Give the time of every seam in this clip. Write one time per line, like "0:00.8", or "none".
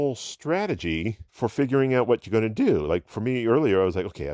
0:01.3